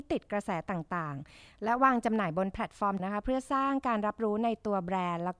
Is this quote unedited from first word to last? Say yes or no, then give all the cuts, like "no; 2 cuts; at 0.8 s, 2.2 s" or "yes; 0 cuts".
no; 1 cut; at 3.0 s